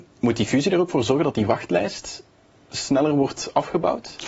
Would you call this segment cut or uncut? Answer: uncut